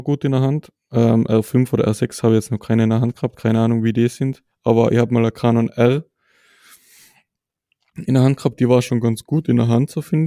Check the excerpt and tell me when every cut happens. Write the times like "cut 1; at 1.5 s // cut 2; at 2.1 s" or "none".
none